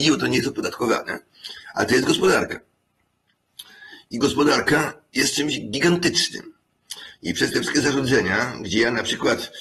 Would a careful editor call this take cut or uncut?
uncut